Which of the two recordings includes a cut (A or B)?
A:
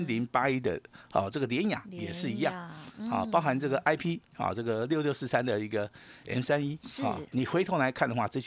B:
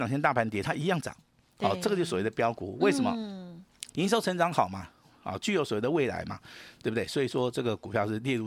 B